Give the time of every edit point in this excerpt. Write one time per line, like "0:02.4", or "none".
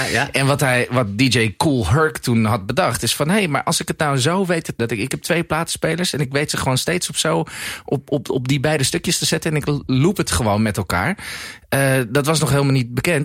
0:04.8

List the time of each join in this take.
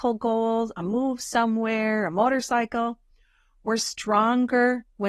none

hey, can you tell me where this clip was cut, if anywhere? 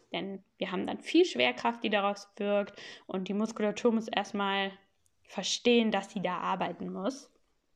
none

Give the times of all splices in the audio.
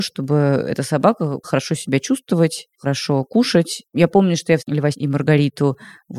0:01.4
0:02.7
0:03.9
0:04.6
0:04.9

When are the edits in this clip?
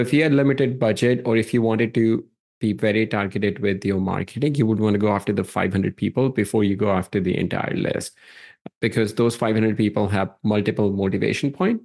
none

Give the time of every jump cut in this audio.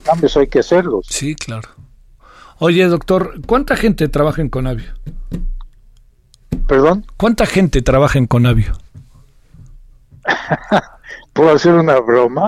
none

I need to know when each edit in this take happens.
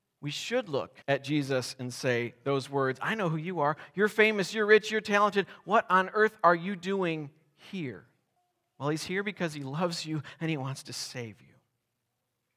0:01.0
0:08.4

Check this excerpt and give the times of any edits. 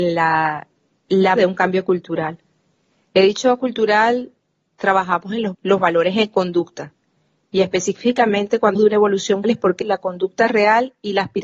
0:01.4
0:03.6
0:05.5
0:08.7
0:09.4
0:09.8

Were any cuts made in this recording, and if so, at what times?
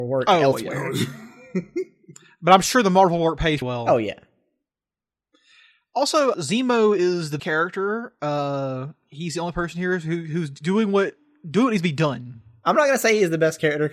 0:03.6
0:06.3
0:07.4

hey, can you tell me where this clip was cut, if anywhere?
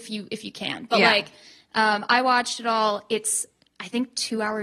none

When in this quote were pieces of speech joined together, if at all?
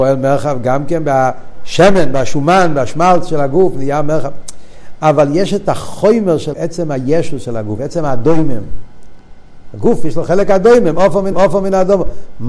0:06.5
0:11.3

